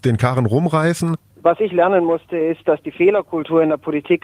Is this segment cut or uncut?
uncut